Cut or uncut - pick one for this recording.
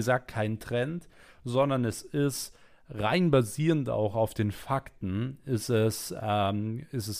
uncut